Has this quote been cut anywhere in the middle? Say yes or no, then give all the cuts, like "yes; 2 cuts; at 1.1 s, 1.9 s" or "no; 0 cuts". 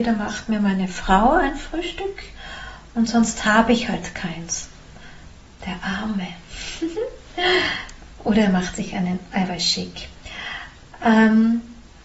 no; 0 cuts